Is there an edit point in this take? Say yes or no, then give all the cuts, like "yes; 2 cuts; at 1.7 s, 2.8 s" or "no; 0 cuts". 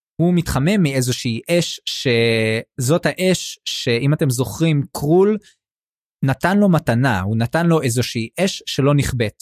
no; 0 cuts